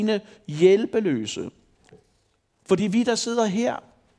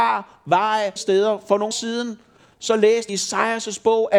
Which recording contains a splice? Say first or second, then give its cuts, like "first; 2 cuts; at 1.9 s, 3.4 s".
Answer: second; 3 cuts; at 1.0 s, 1.7 s, 3.1 s